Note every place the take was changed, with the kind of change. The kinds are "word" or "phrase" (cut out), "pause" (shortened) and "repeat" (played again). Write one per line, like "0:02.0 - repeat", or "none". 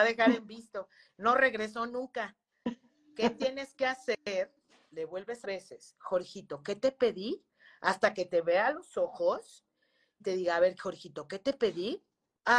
0:05.4 - phrase
0:10.2 - word